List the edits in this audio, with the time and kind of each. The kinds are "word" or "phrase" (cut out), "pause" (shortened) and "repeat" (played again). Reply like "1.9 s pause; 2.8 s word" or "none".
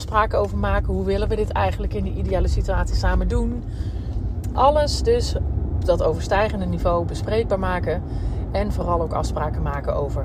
5.8 s word